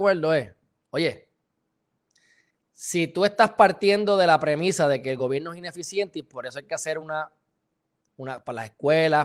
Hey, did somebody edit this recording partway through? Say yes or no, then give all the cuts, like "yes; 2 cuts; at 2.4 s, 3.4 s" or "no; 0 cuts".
no; 0 cuts